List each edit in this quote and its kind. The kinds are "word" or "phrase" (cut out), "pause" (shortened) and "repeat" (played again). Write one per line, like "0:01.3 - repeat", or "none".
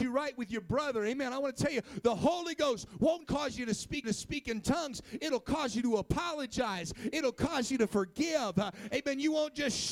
0:03.2 - word
0:04.0 - repeat